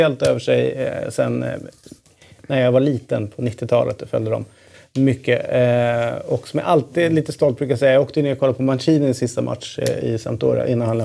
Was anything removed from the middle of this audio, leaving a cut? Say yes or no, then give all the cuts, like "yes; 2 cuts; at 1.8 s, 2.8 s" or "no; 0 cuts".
no; 0 cuts